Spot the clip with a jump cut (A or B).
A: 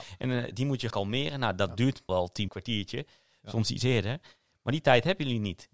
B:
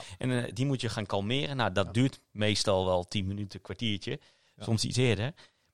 A